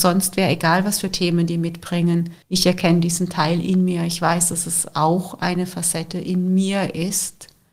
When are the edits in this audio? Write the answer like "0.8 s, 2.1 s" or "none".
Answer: 2.4 s